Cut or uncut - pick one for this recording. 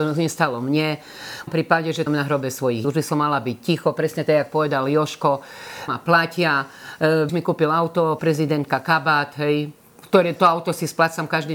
cut